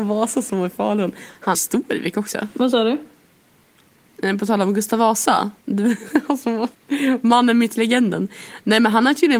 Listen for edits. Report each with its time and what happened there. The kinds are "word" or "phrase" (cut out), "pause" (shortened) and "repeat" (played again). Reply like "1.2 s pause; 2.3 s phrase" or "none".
1.5 s phrase; 5.6 s pause; 6.7 s pause